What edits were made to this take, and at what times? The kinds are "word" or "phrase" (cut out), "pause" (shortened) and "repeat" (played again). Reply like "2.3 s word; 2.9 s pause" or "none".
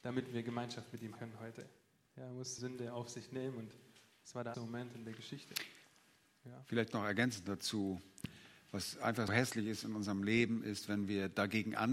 1.2 s word; 2.6 s word; 4.5 s word; 9.3 s word